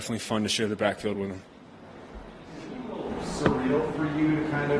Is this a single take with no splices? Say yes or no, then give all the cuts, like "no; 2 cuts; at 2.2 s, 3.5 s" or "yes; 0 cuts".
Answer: yes; 0 cuts